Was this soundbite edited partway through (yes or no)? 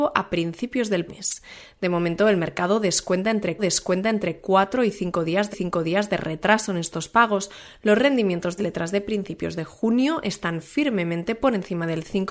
yes